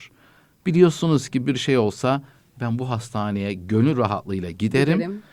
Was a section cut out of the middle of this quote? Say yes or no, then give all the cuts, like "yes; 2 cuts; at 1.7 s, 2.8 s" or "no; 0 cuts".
no; 0 cuts